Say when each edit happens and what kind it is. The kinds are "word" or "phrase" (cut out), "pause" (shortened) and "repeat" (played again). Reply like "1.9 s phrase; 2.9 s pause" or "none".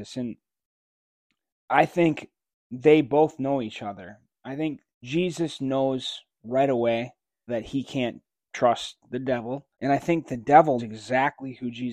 4.9 s pause; 7.5 s word; 9.7 s pause; 10.8 s word